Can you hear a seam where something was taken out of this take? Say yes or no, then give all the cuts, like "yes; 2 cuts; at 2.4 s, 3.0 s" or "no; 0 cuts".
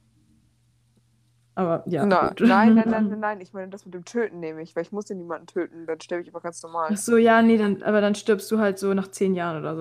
no; 0 cuts